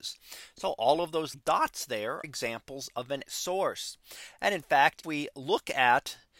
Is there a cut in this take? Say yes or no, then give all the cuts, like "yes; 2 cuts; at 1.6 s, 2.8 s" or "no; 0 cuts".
yes; 4 cuts; at 1.3 s, 2.2 s, 3.3 s, 5.0 s